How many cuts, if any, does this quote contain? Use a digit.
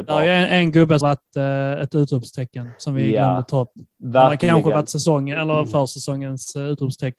1